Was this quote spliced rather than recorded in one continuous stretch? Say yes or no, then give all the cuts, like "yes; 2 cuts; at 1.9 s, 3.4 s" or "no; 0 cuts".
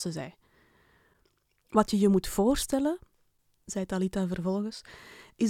no; 0 cuts